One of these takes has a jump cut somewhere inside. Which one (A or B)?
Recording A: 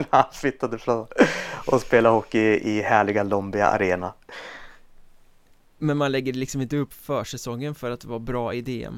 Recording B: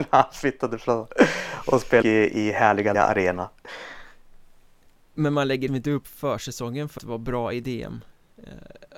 B